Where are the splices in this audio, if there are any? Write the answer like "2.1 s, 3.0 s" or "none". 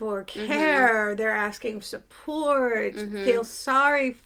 1.8 s